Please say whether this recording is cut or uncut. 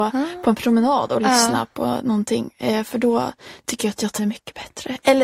cut